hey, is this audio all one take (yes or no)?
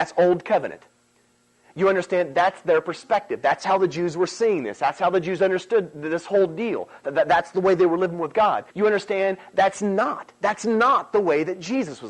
no